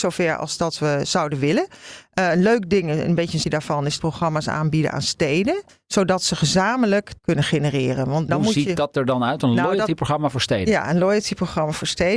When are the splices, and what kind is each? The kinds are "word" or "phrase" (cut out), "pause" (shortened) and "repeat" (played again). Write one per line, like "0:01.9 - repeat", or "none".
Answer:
0:03.4 - word
0:04.0 - phrase
0:05.7 - pause
0:07.2 - word
0:08.3 - word